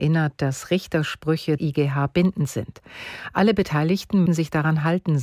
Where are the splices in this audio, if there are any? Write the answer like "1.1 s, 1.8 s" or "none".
1.6 s, 4.3 s